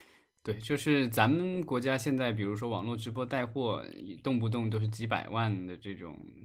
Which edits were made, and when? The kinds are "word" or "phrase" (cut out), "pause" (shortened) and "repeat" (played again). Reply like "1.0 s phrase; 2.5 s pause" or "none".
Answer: none